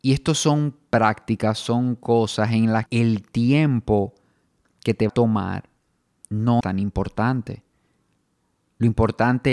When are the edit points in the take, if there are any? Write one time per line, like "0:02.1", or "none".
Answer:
0:02.9
0:05.1
0:06.6

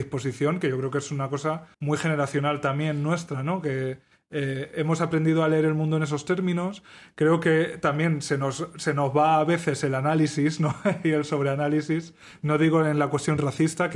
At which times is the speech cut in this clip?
0:01.7

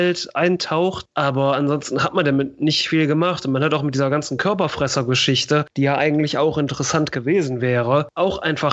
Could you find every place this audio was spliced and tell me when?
none

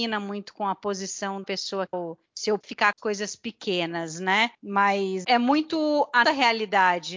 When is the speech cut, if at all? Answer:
0:01.4
0:01.9
0:02.6
0:03.0
0:05.2
0:06.2

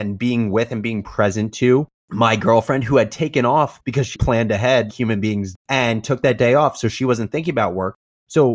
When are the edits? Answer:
0:03.8
0:04.1
0:04.9
0:05.5

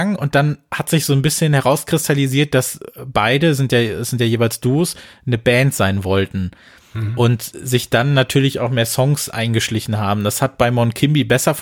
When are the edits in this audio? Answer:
none

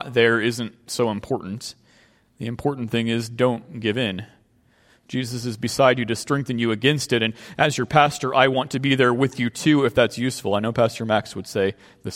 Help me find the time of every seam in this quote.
none

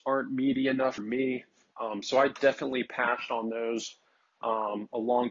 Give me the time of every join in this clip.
0:01.0

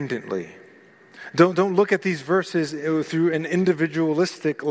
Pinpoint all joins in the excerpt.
none

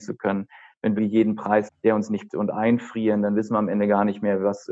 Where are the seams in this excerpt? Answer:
0:01.0
0:01.7
0:02.3

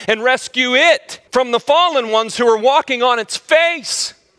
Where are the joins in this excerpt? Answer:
0:01.3

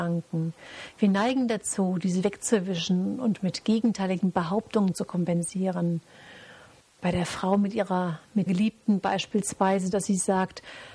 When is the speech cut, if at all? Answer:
0:08.5

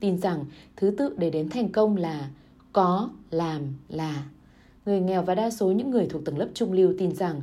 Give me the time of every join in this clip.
none

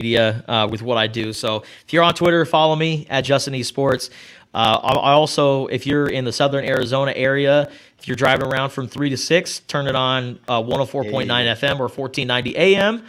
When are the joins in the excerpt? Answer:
none

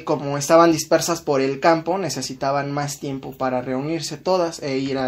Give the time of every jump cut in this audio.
none

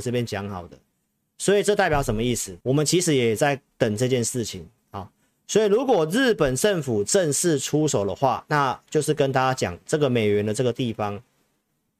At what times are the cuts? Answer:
0:02.6

